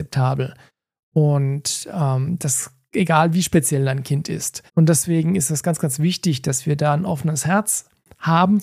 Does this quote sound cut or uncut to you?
cut